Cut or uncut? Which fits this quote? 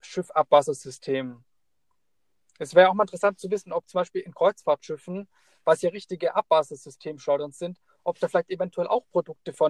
uncut